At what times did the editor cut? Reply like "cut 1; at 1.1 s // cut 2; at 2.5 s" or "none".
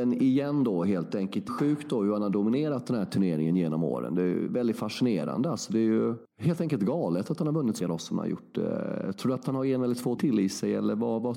cut 1; at 1.5 s // cut 2; at 7.8 s // cut 3; at 10.2 s